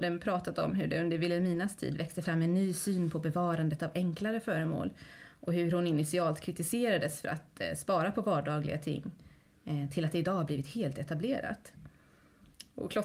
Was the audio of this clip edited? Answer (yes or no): no